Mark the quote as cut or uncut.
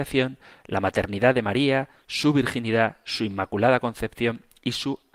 uncut